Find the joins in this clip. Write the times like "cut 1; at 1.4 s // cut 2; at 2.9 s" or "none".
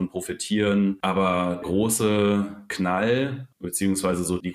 cut 1; at 1.6 s // cut 2; at 3.5 s